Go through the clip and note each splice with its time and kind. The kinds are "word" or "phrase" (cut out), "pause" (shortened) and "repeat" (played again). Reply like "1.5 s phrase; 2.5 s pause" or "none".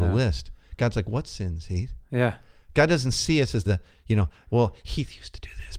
3.7 s phrase